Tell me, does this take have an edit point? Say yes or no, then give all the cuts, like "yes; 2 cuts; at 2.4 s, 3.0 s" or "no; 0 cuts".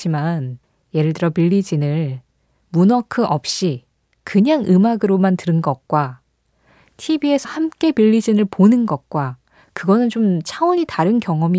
yes; 1 cut; at 7.4 s